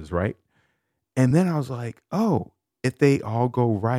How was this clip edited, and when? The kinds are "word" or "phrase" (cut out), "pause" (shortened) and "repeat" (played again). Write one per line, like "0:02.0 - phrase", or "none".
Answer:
none